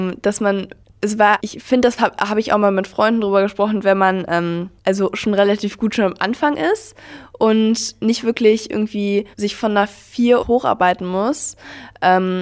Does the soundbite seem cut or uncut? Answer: cut